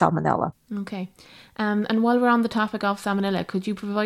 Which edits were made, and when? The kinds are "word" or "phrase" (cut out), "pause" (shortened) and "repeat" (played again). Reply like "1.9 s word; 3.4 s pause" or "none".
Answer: none

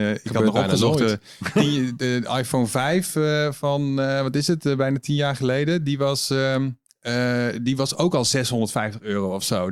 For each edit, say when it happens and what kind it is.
none

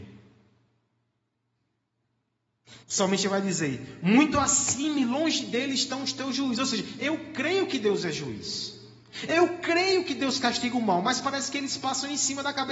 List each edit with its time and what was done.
2.8 s pause

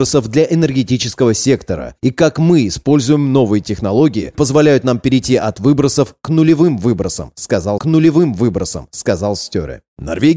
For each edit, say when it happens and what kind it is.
4.3 s word; 7.8 s repeat

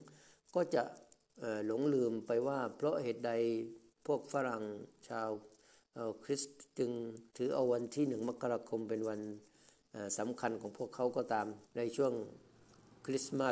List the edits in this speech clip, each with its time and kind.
7.3 s pause; 11.6 s pause

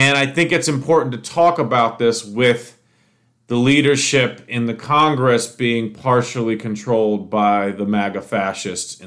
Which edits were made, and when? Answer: none

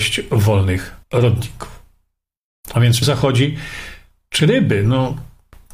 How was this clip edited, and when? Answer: 1.0 s pause; 3.0 s word; 4.4 s word

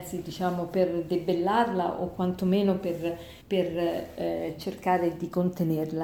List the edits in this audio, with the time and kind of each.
3.4 s pause

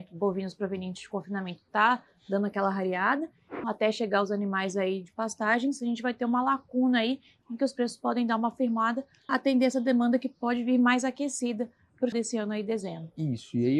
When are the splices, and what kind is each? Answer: 3.6 s word; 9.3 s word; 12.1 s word

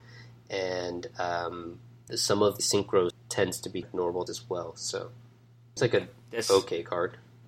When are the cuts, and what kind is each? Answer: 2.1 s word; 2.6 s word; 3.1 s word; 3.8 s word; 4.3 s word; 5.8 s word

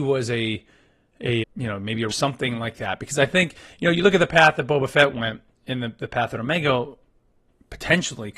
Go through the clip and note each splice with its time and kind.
1.4 s word; 2.1 s phrase; 5.5 s pause

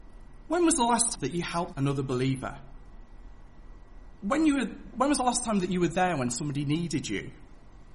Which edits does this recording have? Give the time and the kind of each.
1.1 s word; 1.7 s word

